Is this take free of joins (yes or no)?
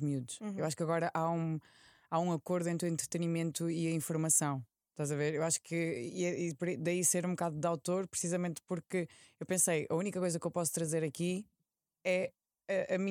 yes